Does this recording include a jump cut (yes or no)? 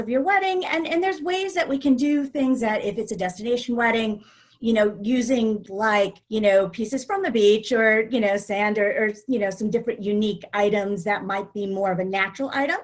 yes